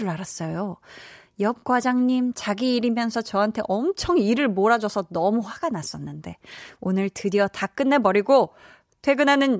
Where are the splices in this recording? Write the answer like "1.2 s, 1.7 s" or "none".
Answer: none